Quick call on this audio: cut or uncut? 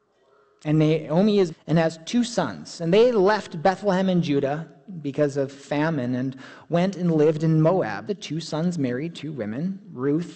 cut